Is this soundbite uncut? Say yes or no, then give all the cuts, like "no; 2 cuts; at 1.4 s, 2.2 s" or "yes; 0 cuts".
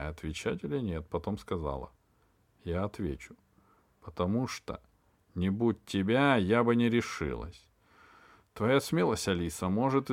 yes; 0 cuts